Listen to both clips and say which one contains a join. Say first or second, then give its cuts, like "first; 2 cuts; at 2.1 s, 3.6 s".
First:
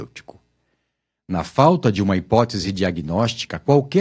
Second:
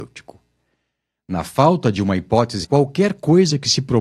second; 1 cut; at 2.6 s